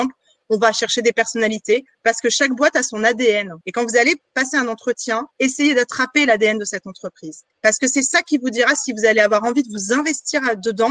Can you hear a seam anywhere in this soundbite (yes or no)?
yes